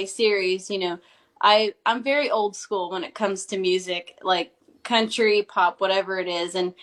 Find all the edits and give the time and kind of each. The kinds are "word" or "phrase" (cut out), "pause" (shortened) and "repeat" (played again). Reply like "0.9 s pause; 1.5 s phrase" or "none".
none